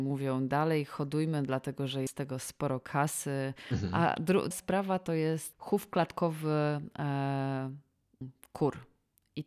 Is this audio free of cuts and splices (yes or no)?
no